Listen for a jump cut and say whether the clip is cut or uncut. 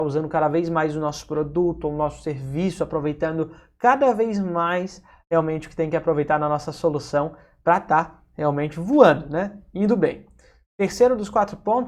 uncut